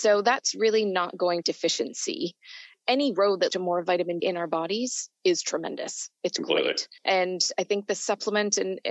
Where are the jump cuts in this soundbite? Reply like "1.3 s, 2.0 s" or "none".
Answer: 1.4 s, 3.5 s, 4.2 s, 7.0 s